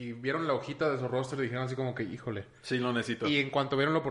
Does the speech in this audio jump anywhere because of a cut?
no; 0 cuts

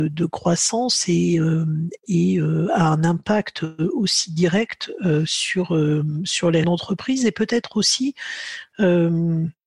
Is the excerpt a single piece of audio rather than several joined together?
no; 1 cut; at 6.6 s

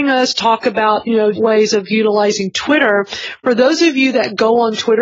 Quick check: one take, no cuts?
no; 1 cut; at 1.4 s

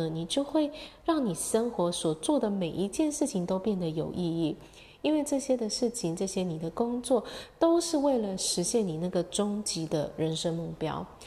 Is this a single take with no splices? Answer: yes; 0 cuts

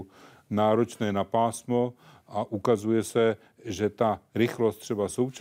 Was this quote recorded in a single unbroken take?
yes; 0 cuts

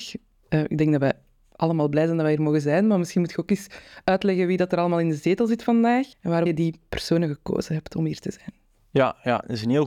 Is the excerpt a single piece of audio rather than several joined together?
no; 2 cuts; at 6.1 s, 6.5 s

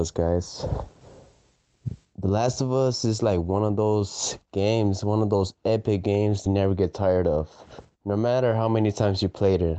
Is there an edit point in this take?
yes; 1 cut; at 6.5 s

